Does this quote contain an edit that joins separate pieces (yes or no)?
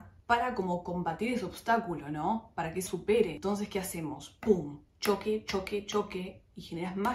yes